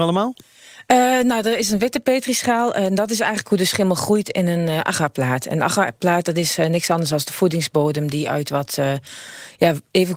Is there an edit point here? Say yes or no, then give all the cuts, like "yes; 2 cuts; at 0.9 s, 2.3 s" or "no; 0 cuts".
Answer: no; 0 cuts